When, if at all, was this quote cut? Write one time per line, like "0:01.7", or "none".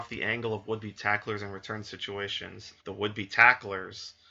0:02.8

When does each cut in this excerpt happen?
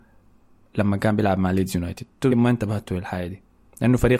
0:02.3

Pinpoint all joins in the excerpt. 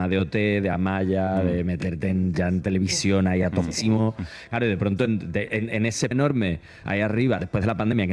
0:06.1

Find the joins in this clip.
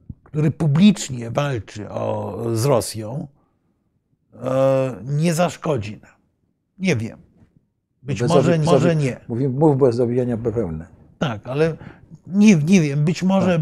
0:08.6

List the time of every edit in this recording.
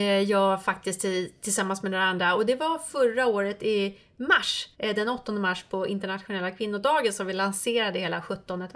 0:04.7

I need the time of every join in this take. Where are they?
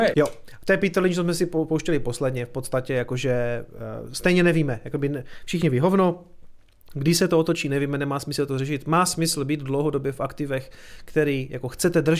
none

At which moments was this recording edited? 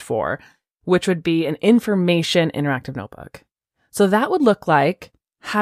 none

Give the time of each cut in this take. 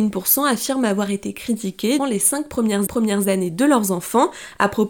0:02.0
0:02.9

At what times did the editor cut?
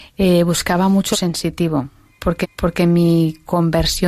0:01.1
0:02.4

